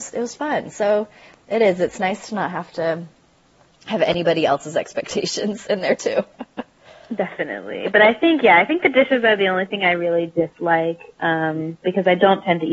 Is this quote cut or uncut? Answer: uncut